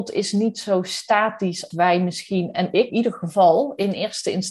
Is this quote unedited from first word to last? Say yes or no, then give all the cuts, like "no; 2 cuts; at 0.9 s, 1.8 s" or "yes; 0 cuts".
no; 2 cuts; at 1.7 s, 2.9 s